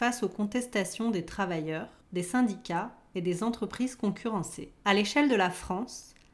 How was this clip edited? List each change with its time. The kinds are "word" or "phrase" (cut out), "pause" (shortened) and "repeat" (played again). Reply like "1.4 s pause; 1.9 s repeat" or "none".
2.0 s pause; 4.8 s pause